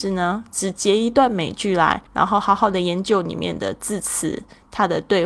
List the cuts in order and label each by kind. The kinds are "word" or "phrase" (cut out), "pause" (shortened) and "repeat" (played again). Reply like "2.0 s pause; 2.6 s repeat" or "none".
2.1 s pause

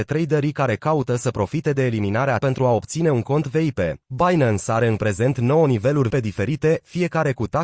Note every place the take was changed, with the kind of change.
2.4 s word; 4.0 s pause; 6.1 s word

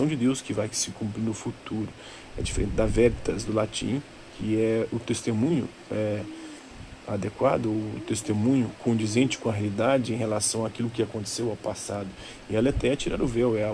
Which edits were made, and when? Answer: none

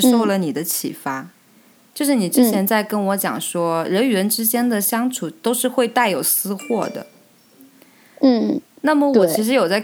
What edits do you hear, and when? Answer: none

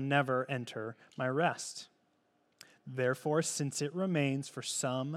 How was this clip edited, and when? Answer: none

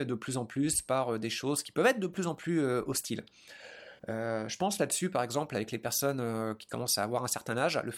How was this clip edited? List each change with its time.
4.0 s pause

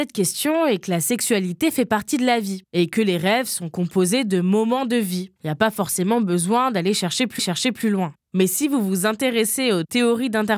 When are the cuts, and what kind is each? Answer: 7.4 s repeat

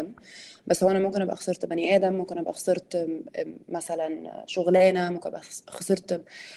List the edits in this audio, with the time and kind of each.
3.6 s pause

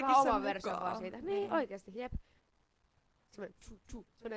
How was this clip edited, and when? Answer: none

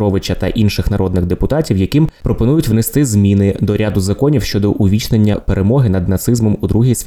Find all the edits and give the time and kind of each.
none

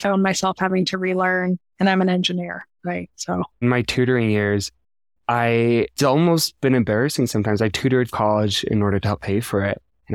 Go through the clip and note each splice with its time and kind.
1.7 s word; 3.6 s word; 6.0 s word; 8.1 s word

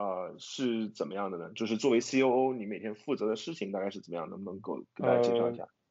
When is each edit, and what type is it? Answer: none

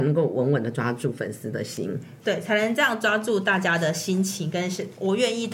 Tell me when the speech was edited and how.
2.2 s pause

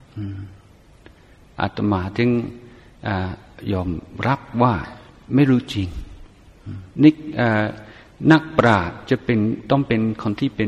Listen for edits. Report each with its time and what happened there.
6.9 s pause

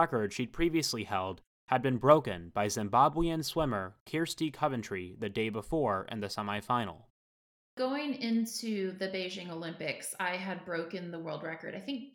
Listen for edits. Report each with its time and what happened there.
none

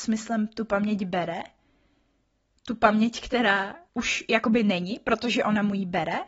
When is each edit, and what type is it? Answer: 3.9 s pause

